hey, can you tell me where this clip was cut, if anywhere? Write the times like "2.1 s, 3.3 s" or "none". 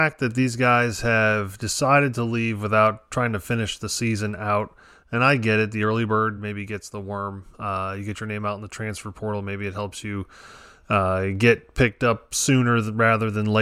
none